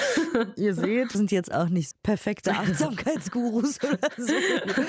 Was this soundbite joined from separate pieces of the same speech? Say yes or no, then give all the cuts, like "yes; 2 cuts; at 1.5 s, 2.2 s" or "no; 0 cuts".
yes; 2 cuts; at 1.1 s, 1.9 s